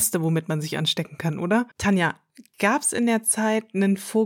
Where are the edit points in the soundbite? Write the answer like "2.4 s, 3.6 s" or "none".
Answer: 1.7 s